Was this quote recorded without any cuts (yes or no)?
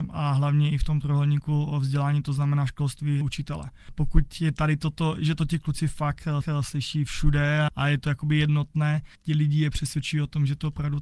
no